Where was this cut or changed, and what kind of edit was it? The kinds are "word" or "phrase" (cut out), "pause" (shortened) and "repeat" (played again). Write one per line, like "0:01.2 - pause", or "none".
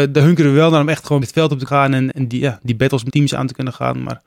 0:01.2 - word
0:01.7 - word
0:02.1 - word
0:03.1 - word

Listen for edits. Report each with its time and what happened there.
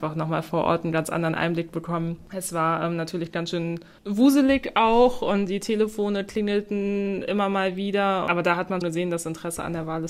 0:04.0 - pause
0:05.5 - word
0:08.8 - word

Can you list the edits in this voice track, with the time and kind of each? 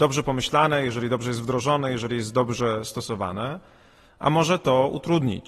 none

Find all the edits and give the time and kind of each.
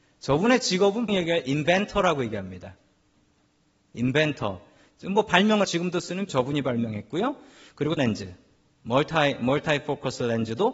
0:01.1 - word
0:05.6 - phrase
0:06.3 - word
0:08.0 - word

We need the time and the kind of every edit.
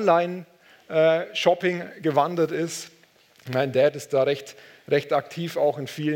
none

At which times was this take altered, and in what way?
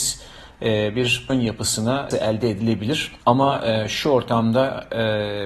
0:01.3 - word
0:02.1 - word
0:03.2 - pause

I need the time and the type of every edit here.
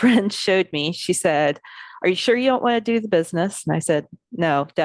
none

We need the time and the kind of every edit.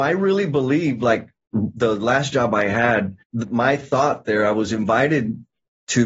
0:03.2 - pause

